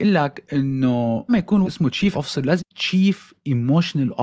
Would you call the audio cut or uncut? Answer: cut